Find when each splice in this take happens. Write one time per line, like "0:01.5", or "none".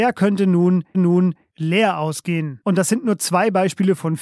0:00.9